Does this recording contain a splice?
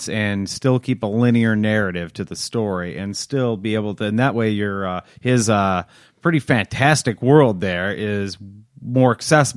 no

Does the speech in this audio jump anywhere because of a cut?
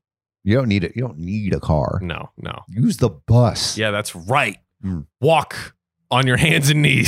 no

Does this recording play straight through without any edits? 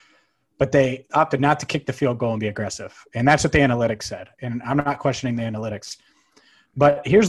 yes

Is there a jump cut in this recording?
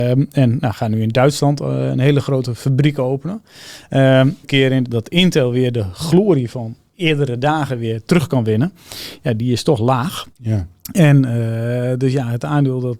yes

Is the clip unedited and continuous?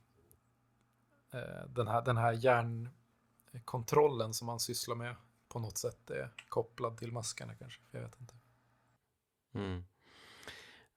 yes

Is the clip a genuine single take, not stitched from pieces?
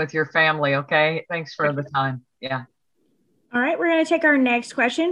yes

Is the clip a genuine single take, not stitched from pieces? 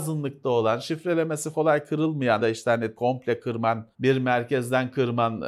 no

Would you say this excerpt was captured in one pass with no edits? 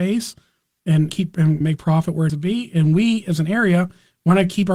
no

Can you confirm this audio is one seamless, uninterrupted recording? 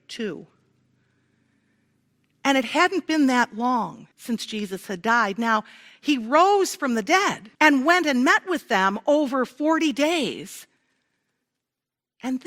no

